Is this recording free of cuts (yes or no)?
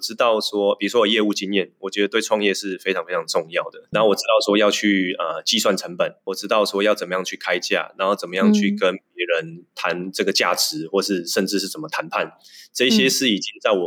yes